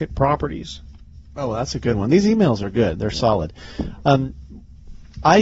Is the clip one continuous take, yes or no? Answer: yes